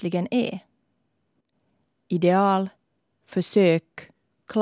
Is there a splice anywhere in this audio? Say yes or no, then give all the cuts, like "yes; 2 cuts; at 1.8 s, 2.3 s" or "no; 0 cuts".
no; 0 cuts